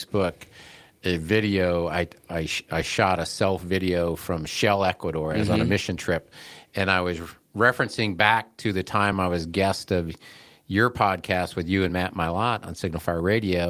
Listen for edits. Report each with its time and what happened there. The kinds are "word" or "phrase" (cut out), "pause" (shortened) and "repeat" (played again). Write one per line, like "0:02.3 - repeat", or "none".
none